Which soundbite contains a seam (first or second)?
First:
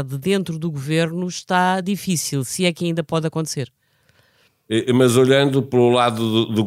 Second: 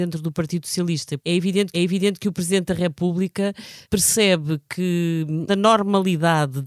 second